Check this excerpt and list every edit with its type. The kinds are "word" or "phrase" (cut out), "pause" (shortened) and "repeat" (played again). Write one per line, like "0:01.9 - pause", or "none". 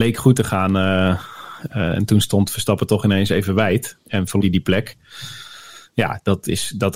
0:04.4 - word